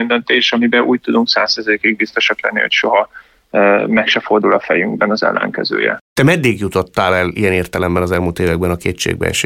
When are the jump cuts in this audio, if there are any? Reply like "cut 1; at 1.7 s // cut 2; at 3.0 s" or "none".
none

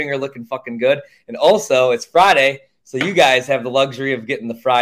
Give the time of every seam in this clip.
none

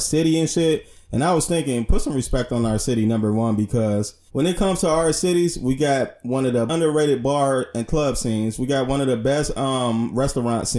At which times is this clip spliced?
cut 1; at 4.3 s // cut 2; at 6.7 s

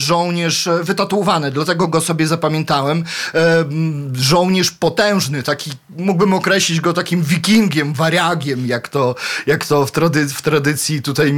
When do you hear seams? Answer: none

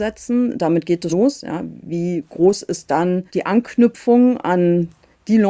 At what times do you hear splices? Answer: cut 1; at 1.1 s // cut 2; at 3.3 s

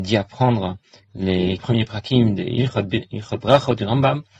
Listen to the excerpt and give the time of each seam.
cut 1; at 1.6 s

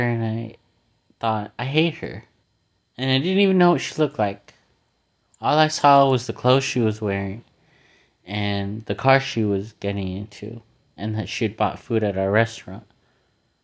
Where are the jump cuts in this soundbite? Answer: cut 1; at 2.4 s

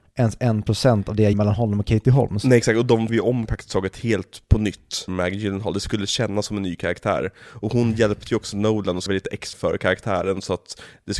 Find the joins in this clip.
cut 1; at 1.3 s // cut 2; at 3.1 s // cut 3; at 3.5 s // cut 4; at 5.1 s // cut 5; at 9.1 s // cut 6; at 9.5 s

